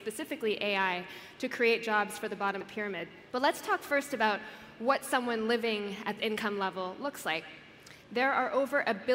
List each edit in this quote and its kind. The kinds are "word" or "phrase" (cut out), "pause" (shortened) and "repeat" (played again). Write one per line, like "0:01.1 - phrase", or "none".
0:02.6 - word
0:03.3 - pause
0:06.2 - word
0:08.0 - pause